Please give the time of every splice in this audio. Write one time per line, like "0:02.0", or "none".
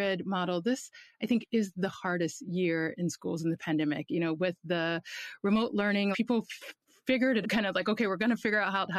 0:06.1
0:07.4